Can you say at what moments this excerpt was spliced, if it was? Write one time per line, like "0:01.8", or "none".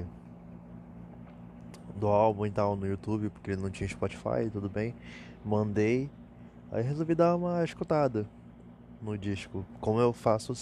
none